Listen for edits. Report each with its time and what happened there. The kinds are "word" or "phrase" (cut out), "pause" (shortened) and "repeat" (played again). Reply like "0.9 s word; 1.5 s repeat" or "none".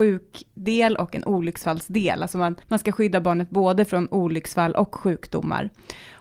2.6 s pause